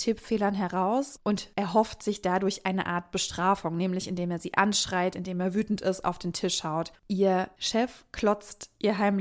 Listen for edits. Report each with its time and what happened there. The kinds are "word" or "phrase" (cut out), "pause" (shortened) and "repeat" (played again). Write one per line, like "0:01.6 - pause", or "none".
0:07.0 - pause